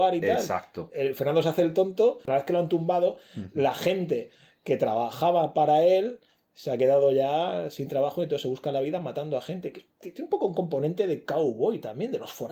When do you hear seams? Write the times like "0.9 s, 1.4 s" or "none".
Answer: none